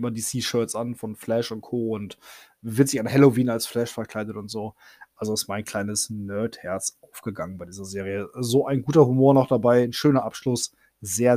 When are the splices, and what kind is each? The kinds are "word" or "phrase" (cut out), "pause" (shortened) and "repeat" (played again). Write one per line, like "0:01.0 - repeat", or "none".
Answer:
none